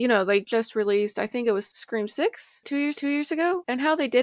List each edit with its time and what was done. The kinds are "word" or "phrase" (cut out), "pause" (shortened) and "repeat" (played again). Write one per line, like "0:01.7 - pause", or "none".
0:02.9 - repeat